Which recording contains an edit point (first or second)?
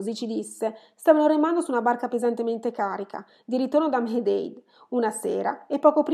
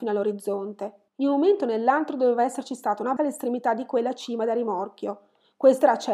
second